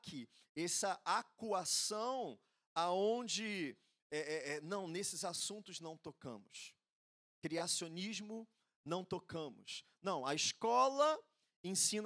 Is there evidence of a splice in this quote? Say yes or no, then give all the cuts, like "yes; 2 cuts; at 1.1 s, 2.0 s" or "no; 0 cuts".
no; 0 cuts